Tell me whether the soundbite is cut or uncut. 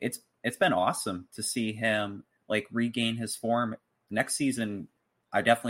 uncut